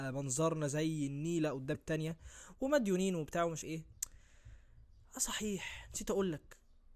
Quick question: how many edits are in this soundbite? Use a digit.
2